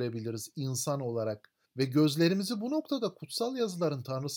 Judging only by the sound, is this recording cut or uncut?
cut